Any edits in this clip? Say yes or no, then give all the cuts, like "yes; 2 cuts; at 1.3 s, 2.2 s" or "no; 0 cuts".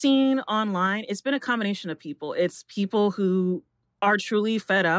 no; 0 cuts